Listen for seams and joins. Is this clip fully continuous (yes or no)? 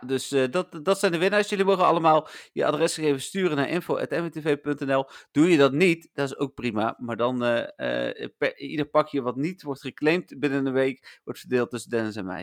yes